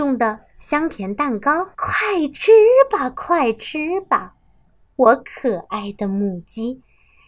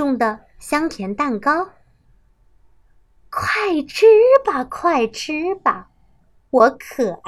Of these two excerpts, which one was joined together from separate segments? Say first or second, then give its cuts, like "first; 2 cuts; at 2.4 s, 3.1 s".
first; 1 cut; at 1.7 s